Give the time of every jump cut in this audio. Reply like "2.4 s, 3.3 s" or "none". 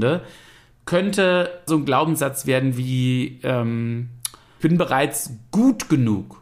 1.7 s, 4.6 s